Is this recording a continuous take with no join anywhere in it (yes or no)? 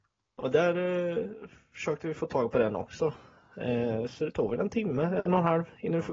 yes